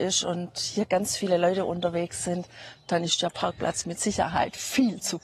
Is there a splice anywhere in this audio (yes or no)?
no